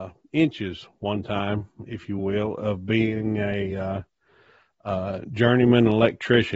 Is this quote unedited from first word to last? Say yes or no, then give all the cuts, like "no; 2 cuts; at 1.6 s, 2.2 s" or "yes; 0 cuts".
yes; 0 cuts